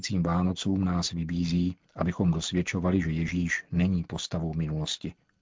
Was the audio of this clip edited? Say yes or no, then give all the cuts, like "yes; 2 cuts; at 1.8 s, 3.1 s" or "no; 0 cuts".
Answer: no; 0 cuts